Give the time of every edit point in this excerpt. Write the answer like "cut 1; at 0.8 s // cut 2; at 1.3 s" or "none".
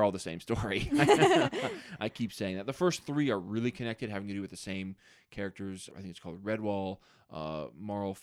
cut 1; at 5.9 s